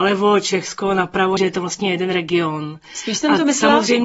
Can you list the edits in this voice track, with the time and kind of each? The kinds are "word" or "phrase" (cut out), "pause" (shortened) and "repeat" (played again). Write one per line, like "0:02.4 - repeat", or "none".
0:01.4 - phrase